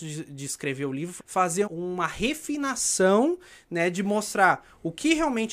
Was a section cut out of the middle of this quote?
yes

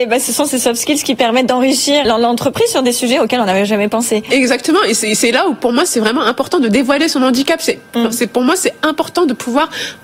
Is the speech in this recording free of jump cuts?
no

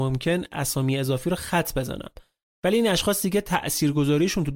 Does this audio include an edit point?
no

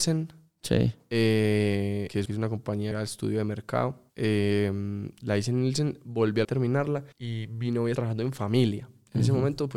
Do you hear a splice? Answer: yes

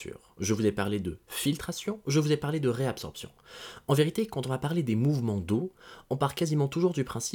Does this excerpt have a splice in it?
no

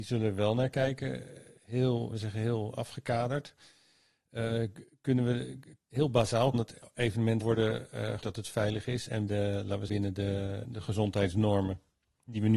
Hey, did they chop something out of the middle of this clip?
yes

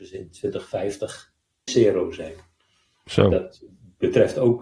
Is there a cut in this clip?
yes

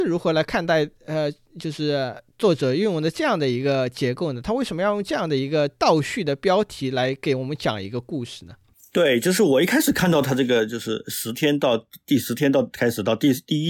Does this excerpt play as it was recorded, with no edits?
yes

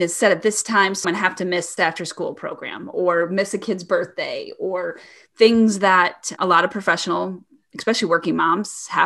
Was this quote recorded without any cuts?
no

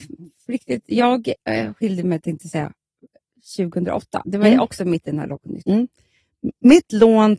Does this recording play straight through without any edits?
yes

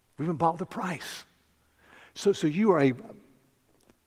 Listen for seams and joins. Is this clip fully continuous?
yes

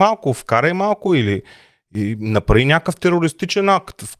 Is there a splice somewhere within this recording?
no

